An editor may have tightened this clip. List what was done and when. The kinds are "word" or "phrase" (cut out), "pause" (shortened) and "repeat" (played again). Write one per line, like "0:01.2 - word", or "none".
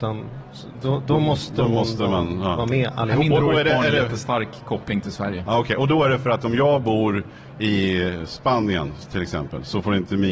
none